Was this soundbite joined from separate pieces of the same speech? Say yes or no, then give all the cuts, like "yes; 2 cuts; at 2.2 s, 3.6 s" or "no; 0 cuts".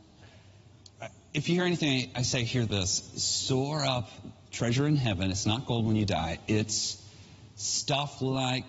no; 0 cuts